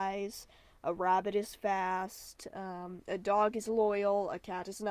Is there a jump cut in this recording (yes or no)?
no